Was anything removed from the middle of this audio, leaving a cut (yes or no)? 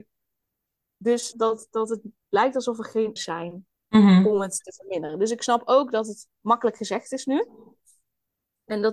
yes